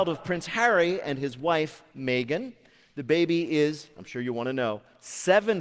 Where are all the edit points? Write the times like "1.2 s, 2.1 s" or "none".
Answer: none